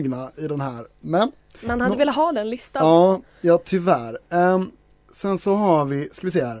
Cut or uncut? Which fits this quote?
uncut